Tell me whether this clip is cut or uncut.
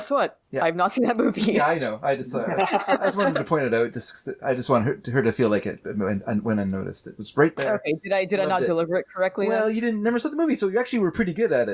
uncut